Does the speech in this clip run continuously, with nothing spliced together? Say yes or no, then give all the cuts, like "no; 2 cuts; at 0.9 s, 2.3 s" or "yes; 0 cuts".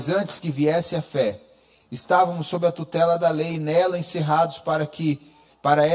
yes; 0 cuts